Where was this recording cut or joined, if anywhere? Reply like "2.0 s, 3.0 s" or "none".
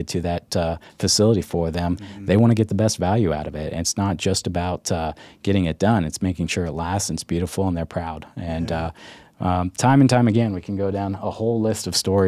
none